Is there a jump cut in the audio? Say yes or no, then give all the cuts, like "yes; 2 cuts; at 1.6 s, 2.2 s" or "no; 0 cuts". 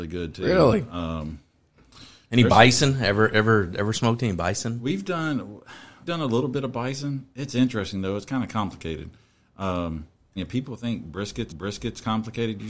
yes; 3 cuts; at 6.1 s, 10.4 s, 11.5 s